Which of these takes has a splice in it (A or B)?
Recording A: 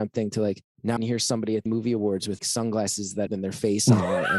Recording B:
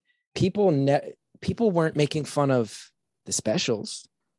A